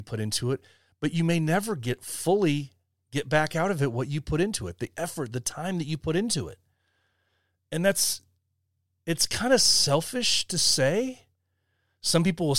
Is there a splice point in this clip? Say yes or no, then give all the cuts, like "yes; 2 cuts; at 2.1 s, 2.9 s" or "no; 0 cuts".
no; 0 cuts